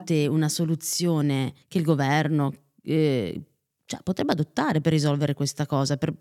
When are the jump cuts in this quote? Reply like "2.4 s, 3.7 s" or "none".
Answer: 1.6 s